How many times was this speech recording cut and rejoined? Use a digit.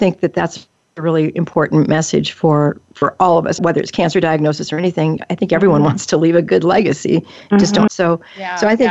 2